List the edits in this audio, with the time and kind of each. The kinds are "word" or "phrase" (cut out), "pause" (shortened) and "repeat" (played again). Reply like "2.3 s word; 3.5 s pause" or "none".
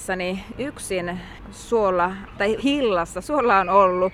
2.6 s word; 3.2 s word

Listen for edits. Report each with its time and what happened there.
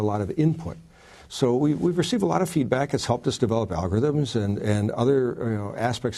none

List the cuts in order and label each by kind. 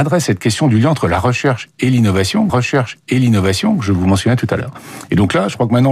2.5 s repeat

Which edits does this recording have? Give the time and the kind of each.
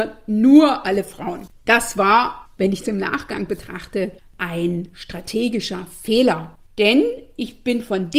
1.6 s pause; 2.8 s phrase; 6.6 s pause

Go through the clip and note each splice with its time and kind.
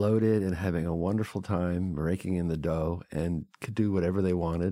none

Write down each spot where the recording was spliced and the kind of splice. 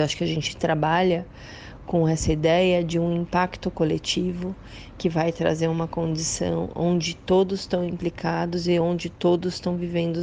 none

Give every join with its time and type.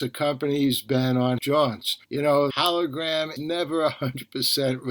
1.4 s word; 2.0 s pause; 2.5 s word; 3.4 s word

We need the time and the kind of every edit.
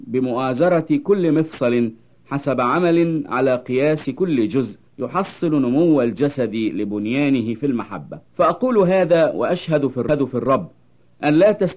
4.9 s pause; 8.3 s pause

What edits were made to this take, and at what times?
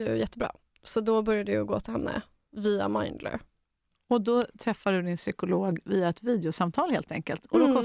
none

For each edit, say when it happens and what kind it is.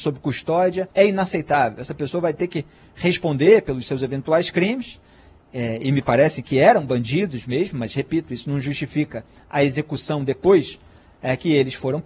0.9 s pause

